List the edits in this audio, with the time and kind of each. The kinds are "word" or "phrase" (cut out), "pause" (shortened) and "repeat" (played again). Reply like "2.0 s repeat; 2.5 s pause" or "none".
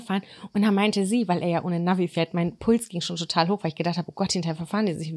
none